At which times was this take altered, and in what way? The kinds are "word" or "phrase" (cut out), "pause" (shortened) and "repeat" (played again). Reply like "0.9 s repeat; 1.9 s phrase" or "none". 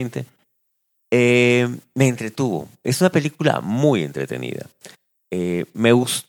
none